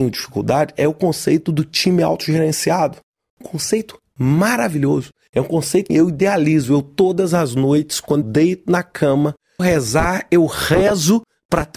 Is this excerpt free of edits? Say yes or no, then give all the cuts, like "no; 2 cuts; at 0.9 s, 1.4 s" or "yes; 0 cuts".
no; 4 cuts; at 3.4 s, 5.9 s, 8.2 s, 9.6 s